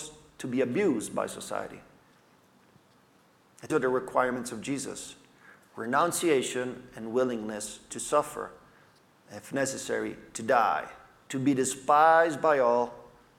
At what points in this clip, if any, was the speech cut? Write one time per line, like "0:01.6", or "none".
0:03.7